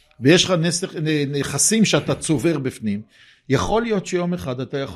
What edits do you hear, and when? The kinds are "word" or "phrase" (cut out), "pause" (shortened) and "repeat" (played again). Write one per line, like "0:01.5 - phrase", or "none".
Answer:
none